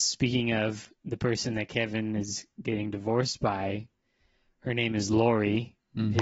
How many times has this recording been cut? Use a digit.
1